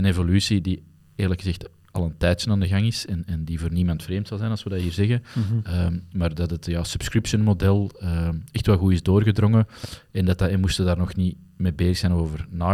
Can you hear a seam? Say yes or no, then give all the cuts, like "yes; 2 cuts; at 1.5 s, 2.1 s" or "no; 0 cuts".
no; 0 cuts